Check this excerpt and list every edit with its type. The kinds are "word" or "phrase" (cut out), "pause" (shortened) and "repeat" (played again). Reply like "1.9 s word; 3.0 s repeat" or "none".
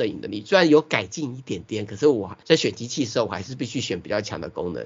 2.4 s pause